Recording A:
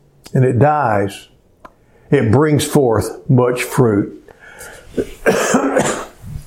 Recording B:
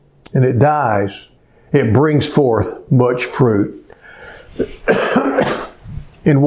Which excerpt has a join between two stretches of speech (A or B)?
B